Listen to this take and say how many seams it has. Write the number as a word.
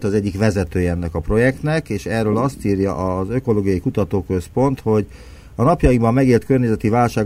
zero